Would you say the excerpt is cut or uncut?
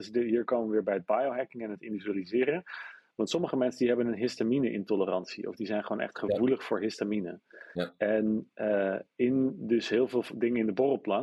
uncut